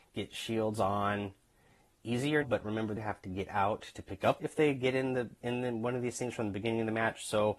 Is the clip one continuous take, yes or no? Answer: no